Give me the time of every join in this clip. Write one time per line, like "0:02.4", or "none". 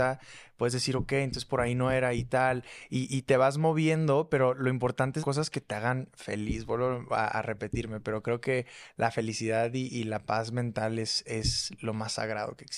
0:05.2